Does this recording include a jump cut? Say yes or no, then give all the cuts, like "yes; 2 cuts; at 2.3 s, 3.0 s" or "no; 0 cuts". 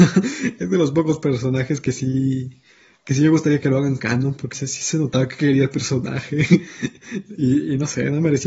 yes; 1 cut; at 4.5 s